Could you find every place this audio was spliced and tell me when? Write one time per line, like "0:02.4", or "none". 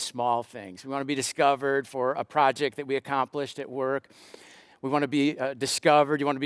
none

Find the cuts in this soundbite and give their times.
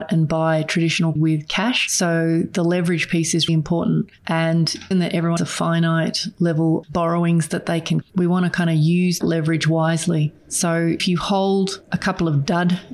0:01.2
0:03.5
0:04.9
0:05.4
0:06.8
0:08.0
0:09.2
0:11.0

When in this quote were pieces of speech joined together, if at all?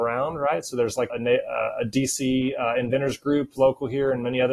0:01.1
0:03.6

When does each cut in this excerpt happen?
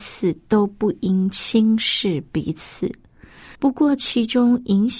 0:03.5

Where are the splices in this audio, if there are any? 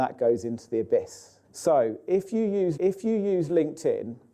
0:01.4
0:02.8

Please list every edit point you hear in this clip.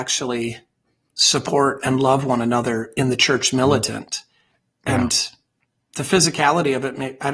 none

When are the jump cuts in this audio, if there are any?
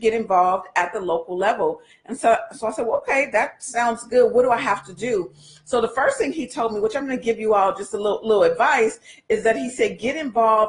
none

